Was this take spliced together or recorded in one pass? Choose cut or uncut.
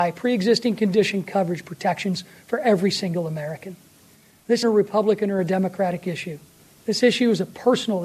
cut